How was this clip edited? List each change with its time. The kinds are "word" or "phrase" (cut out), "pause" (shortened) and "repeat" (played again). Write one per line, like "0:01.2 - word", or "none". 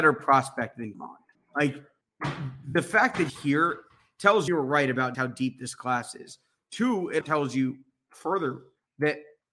0:00.9 - word
0:03.3 - word
0:04.5 - phrase
0:05.1 - word
0:07.2 - word